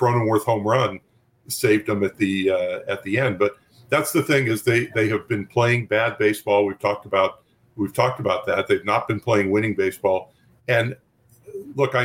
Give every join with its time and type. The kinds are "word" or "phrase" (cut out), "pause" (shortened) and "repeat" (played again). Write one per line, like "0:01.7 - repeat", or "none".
none

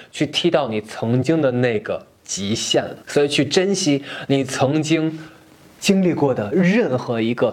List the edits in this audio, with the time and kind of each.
0:03.0 - pause
0:05.8 - word

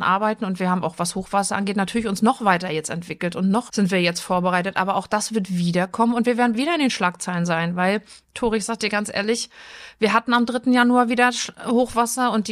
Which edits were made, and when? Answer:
0:03.7 - word
0:06.5 - word

